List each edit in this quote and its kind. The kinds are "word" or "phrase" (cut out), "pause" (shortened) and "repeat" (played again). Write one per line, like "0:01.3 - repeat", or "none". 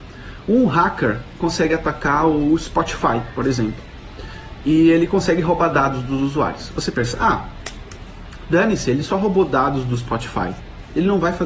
0:01.4 - phrase